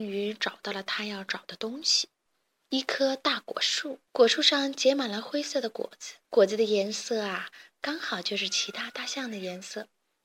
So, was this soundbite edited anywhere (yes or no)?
yes